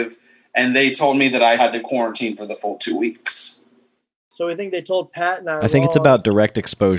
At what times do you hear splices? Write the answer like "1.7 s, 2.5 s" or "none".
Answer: 1.6 s